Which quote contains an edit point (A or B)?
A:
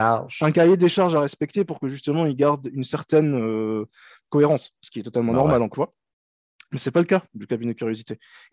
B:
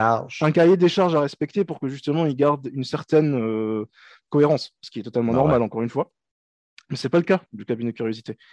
A